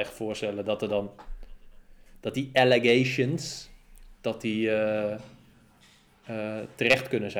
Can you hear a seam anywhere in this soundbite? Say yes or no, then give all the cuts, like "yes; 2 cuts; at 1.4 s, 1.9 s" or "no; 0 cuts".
no; 0 cuts